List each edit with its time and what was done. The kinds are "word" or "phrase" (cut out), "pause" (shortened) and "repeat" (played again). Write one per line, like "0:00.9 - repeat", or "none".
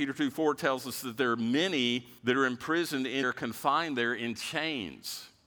0:02.2 - pause
0:03.2 - phrase